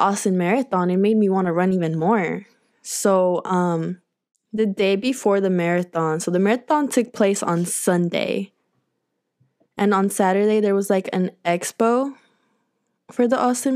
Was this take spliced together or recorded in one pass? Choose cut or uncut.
uncut